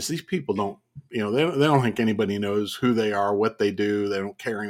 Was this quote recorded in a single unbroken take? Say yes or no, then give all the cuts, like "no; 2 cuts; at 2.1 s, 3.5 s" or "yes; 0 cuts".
yes; 0 cuts